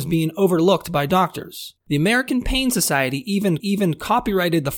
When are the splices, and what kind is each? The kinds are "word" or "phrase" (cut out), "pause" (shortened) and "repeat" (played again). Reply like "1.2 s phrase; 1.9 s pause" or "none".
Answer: 1.8 s pause; 3.6 s repeat